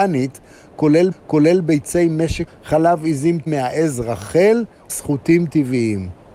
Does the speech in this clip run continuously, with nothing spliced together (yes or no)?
no